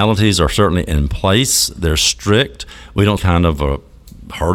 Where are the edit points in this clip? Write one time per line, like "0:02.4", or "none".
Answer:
0:03.2